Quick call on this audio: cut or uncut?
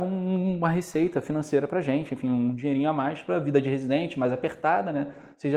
uncut